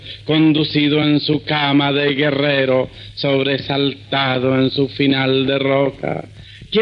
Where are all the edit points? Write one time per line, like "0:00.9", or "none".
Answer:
none